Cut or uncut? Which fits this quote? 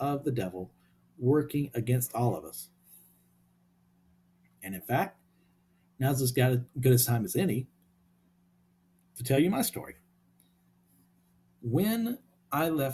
uncut